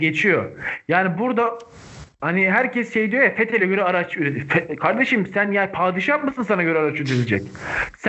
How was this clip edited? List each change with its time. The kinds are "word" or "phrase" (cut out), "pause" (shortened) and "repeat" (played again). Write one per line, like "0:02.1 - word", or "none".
none